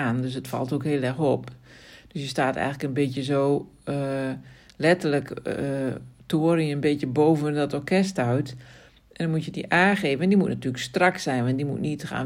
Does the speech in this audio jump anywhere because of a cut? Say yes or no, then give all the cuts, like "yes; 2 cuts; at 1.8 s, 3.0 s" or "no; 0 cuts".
no; 0 cuts